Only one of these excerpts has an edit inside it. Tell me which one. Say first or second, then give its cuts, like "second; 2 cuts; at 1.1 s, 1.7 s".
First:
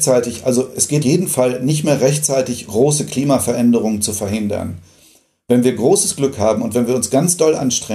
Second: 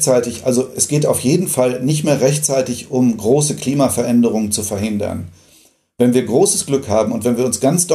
first; 2 cuts; at 1.0 s, 2.7 s